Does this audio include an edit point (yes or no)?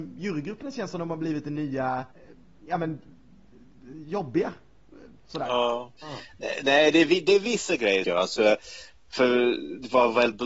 yes